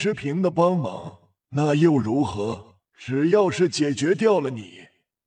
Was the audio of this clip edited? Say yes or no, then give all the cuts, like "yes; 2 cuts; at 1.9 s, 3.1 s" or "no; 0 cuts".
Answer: yes; 2 cuts; at 1.4 s, 2.8 s